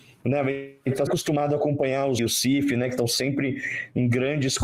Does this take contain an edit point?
yes; 2 cuts; at 1.1 s, 2.2 s

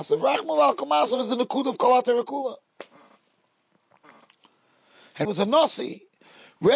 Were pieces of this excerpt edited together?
yes; 1 cut; at 5.2 s

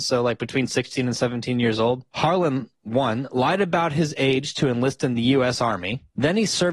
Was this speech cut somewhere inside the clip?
no; 0 cuts

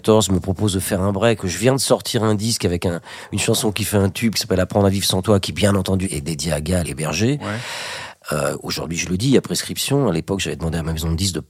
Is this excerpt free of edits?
no; 3 cuts; at 1.4 s, 6.0 s, 6.8 s

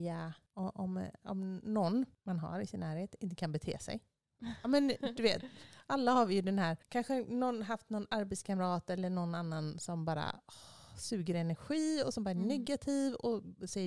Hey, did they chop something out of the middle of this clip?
yes; 1 cut; at 6.8 s

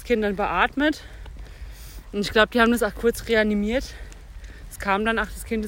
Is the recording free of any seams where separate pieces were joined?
yes; 0 cuts

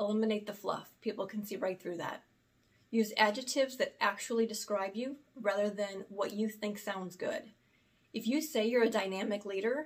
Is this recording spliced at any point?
no; 0 cuts

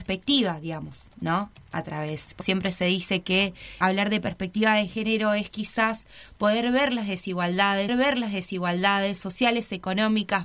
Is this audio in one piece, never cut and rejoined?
no; 4 cuts; at 1.1 s, 2.4 s, 3.8 s, 7.9 s

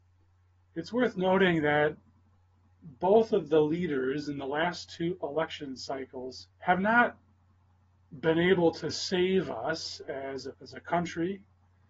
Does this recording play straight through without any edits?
no; 2 cuts; at 6.5 s, 10.5 s

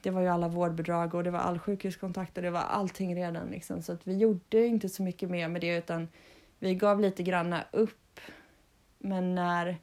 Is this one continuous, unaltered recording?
yes; 0 cuts

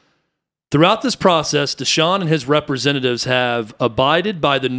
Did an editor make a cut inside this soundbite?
no; 0 cuts

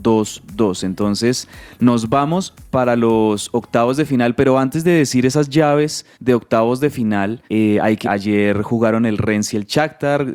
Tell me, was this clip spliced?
yes; 3 cuts; at 6.1 s, 7.5 s, 8.0 s

